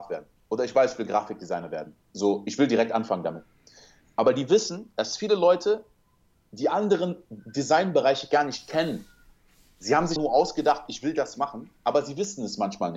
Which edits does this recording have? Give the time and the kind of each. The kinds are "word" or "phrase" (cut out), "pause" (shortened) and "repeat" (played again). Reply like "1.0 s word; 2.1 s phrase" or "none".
10.2 s word